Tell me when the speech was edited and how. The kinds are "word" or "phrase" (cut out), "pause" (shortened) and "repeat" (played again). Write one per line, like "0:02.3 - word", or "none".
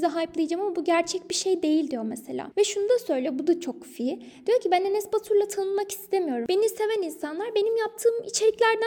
none